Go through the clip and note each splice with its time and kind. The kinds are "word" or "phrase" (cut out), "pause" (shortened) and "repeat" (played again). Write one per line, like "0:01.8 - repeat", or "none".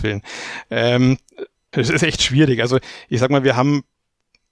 0:01.7 - word